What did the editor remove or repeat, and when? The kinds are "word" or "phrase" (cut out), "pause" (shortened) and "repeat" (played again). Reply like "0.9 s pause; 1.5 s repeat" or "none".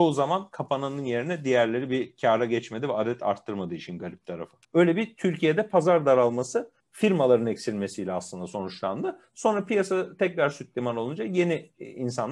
4.6 s pause; 6.8 s pause